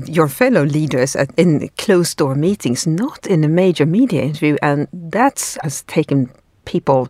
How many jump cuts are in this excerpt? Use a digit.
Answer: 2